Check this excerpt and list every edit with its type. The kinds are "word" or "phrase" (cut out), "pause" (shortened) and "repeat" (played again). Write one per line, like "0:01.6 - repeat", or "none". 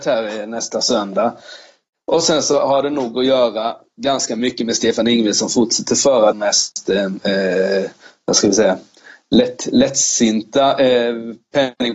0:06.3 - word